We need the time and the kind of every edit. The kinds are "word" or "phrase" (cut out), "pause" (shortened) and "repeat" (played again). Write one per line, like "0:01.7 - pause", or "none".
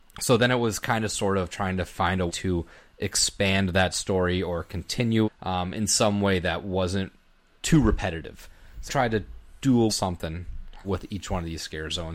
0:02.3 - word
0:05.2 - word
0:07.6 - word
0:08.9 - word
0:09.9 - word
0:10.8 - word